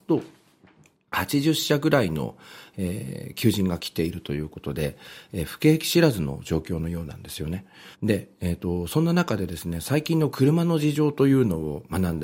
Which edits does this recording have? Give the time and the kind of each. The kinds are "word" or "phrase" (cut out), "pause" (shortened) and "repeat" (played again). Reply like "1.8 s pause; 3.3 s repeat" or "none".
7.9 s pause